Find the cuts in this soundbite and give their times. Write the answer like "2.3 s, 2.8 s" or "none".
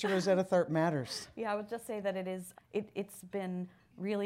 2.5 s

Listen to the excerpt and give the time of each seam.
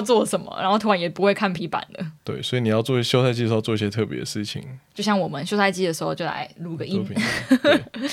1.6 s, 2.2 s

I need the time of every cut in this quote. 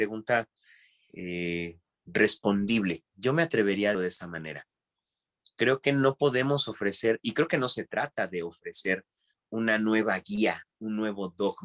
3.9 s

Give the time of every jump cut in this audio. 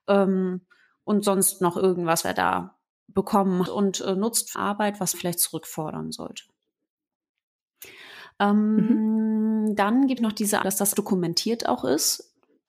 2.2 s, 3.7 s, 4.5 s, 5.1 s, 10.2 s, 10.6 s, 10.9 s

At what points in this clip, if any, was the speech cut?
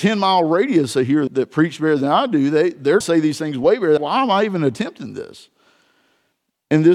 1.3 s, 3.0 s, 4.0 s

